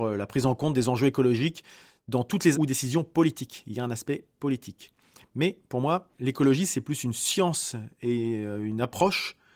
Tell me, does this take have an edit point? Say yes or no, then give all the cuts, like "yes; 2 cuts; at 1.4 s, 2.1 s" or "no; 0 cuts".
yes; 1 cut; at 2.5 s